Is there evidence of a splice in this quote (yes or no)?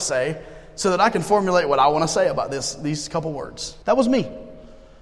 yes